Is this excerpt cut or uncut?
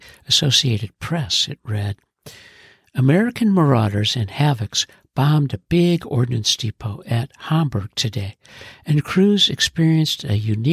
uncut